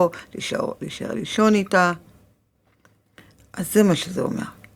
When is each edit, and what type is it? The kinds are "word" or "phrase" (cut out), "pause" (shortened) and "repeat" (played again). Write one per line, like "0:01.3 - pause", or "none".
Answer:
none